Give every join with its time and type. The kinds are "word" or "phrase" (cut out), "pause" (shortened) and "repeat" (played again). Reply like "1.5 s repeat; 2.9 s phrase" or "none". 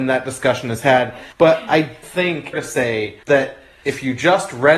1.3 s pause; 2.0 s word; 2.5 s phrase; 3.2 s pause